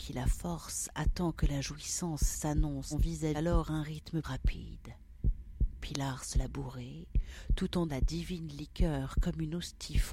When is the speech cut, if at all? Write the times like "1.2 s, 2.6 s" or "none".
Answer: 2.9 s, 3.3 s, 4.2 s, 6.3 s, 7.9 s